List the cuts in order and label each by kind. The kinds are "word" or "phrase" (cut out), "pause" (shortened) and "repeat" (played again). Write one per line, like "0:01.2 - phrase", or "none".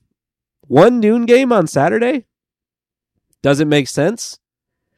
none

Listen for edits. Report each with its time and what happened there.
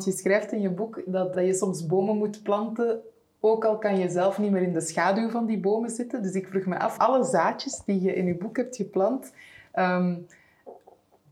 0:01.3 - word
0:07.0 - word

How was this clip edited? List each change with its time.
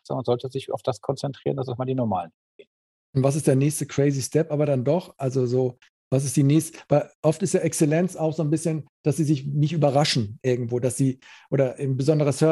none

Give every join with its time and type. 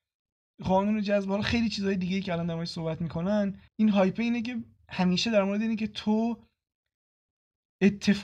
0:03.7 - pause
0:04.8 - pause

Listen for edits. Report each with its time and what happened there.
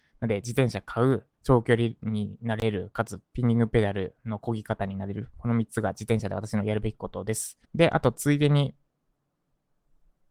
0:01.3 - pause
0:07.6 - pause

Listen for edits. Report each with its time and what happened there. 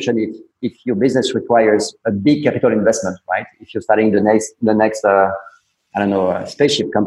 none

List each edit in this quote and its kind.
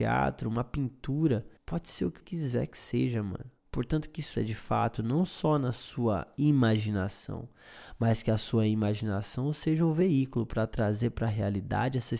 0:01.6 - pause
0:02.2 - word
0:03.6 - pause
0:04.3 - word

